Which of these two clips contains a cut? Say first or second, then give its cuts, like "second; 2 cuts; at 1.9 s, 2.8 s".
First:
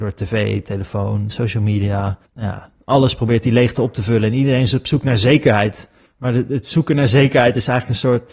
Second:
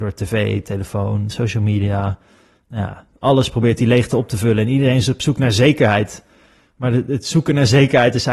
first; 2 cuts; at 2.3 s, 6.1 s